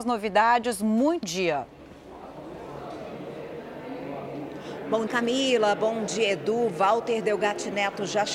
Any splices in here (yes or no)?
yes